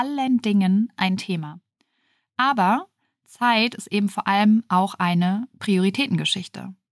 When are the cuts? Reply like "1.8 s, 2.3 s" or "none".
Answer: none